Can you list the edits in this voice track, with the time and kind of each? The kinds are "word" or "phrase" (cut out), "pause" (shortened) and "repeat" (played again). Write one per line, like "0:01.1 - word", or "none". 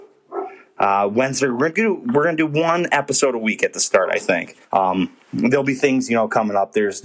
0:04.6 - pause

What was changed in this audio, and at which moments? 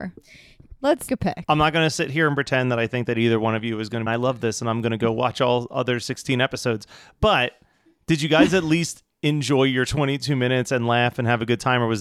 0:01.1 - word
0:04.1 - phrase

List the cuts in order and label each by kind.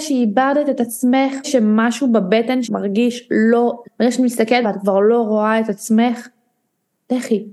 0:01.4 - word
0:02.6 - word
0:03.8 - word
0:04.6 - word

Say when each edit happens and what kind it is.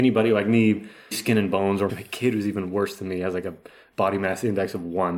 0:01.1 - word
0:01.9 - word

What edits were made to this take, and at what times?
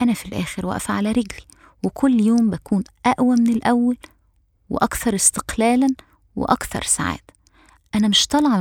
none

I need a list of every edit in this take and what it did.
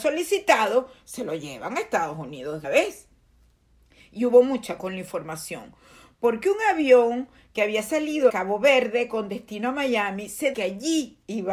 0:02.6 - word
0:04.8 - word
0:08.3 - word
0:10.5 - word

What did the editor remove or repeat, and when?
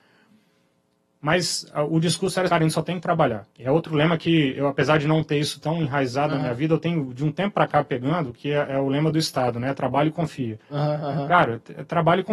0:02.5 - word
0:03.5 - pause

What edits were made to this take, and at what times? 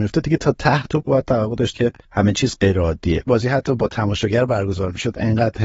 0:01.7 - word
0:03.3 - phrase

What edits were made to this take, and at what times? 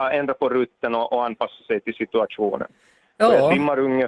none

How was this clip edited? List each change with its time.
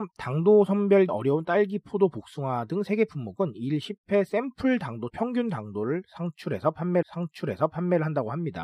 0:01.1 - word
0:05.1 - word
0:07.0 - repeat

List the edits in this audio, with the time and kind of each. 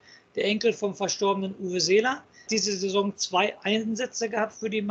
0:02.5 - word

